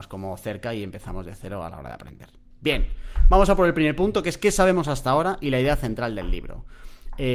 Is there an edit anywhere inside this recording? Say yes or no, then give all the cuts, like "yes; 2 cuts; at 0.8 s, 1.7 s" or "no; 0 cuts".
no; 0 cuts